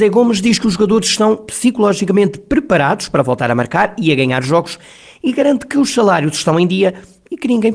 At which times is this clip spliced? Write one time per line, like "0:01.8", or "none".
none